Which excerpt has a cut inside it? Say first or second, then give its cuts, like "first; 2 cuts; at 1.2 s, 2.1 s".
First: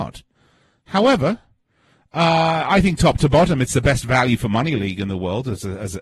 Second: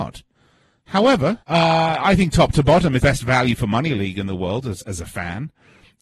second; 3 cuts; at 1.4 s, 3.0 s, 4.8 s